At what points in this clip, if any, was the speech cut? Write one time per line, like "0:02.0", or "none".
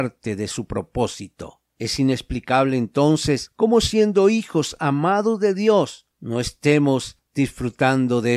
0:01.7